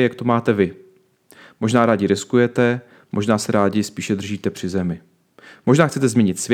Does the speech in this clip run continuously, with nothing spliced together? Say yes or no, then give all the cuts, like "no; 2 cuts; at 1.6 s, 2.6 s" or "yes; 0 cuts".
yes; 0 cuts